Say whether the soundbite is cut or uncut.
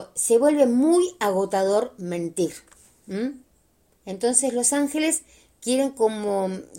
uncut